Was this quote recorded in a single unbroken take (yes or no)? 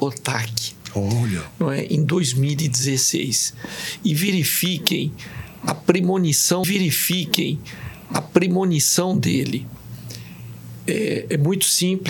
no